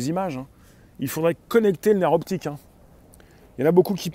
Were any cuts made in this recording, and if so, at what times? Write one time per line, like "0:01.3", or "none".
none